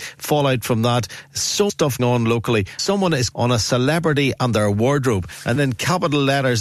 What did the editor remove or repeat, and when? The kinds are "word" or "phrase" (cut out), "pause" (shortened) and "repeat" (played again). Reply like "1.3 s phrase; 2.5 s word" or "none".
1.7 s word; 2.0 s word; 2.8 s word; 3.3 s word; 5.6 s word